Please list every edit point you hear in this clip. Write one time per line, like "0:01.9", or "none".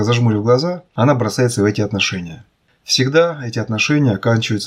none